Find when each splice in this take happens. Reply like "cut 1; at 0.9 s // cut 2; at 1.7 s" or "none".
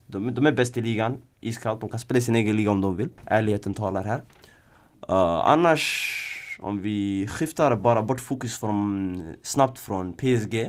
cut 1; at 3.2 s